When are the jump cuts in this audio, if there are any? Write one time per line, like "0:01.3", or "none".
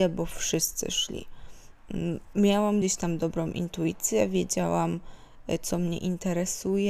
none

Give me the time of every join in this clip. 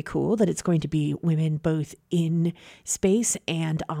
none

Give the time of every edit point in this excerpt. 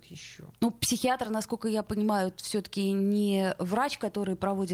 none

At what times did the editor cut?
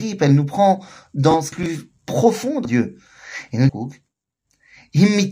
0:01.5
0:02.6
0:03.7

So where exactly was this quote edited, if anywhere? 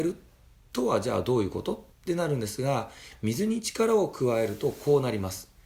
0:01.9

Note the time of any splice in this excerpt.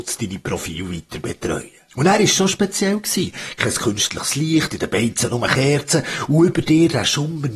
0:01.9

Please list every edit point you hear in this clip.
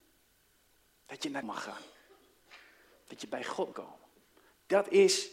0:01.4
0:03.7

